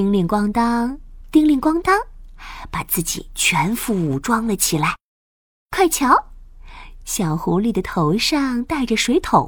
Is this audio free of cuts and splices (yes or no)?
yes